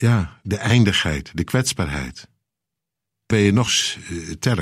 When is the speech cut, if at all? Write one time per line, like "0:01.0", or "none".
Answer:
0:03.3
0:03.7